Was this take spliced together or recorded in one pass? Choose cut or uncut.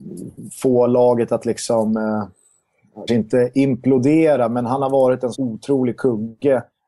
cut